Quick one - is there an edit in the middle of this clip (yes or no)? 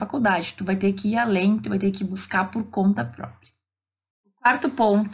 no